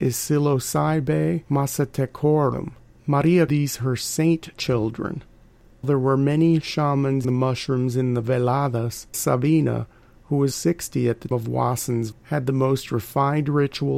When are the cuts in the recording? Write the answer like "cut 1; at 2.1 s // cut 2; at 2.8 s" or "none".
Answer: cut 1; at 3.5 s // cut 2; at 5.8 s // cut 3; at 7.2 s // cut 4; at 9.1 s // cut 5; at 10.5 s // cut 6; at 11.3 s // cut 7; at 12.1 s